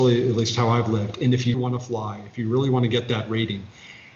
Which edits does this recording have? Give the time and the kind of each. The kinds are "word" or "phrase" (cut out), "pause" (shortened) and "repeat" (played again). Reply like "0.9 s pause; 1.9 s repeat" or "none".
1.5 s word